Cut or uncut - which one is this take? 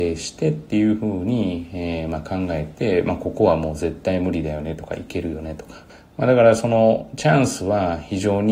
cut